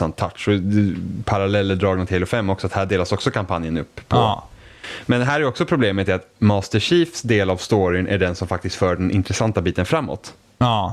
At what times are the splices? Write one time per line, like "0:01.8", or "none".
none